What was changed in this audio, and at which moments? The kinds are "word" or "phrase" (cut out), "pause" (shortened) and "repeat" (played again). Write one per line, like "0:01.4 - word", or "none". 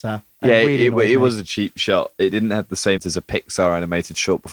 0:03.0 - word